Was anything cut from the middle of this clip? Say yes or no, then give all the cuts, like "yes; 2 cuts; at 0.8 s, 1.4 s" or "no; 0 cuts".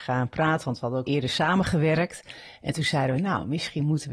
yes; 1 cut; at 1.1 s